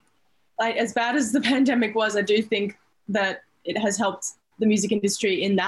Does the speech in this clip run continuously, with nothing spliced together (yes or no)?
yes